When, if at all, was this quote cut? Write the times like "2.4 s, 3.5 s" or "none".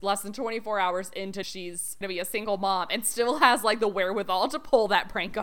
1.4 s, 2.0 s